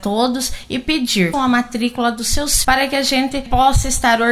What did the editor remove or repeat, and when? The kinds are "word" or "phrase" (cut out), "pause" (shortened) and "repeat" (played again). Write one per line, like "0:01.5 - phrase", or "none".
0:01.3 - word
0:02.6 - word